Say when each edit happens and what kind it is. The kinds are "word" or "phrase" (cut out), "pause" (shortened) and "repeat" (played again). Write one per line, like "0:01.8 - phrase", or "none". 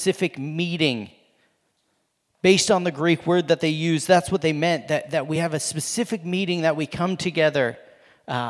none